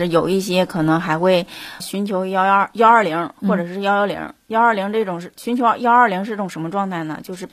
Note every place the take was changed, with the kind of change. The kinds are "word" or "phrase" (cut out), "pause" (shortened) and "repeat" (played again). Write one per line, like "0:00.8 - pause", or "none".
0:01.8 - word

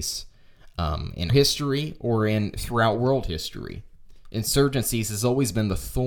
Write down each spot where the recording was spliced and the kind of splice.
0:01.3 - word

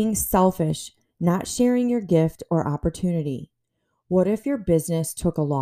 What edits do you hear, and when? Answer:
none

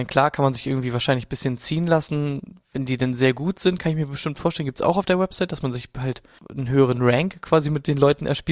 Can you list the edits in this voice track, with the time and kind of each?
none

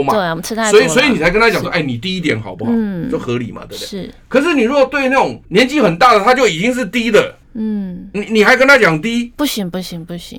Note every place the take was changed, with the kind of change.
0:05.4 - pause
0:07.4 - pause

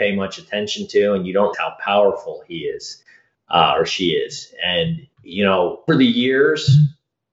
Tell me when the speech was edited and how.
0:01.5 - word
0:05.1 - pause
0:05.9 - word

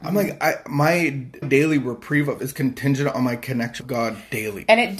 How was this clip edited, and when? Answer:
0:01.4 - word
0:02.4 - word
0:03.8 - word

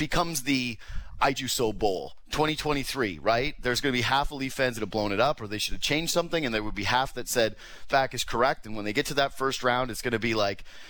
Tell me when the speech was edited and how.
0:01.3 - word
0:04.8 - phrase
0:07.9 - phrase

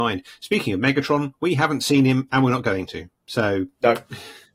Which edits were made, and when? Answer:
none

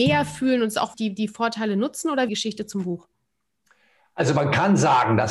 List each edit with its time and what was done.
0:00.9 - word
0:02.3 - phrase

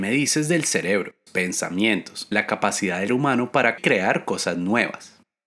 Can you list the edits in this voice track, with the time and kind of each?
0:01.3 - word
0:02.3 - phrase
0:03.1 - word
0:03.8 - phrase

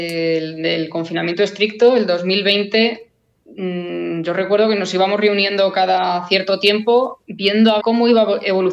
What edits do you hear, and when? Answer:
0:07.2 - pause
0:07.8 - word

